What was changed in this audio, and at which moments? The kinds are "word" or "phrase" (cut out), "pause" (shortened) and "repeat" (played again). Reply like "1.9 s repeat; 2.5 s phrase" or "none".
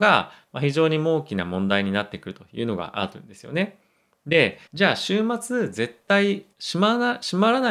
4.7 s pause; 6.5 s pause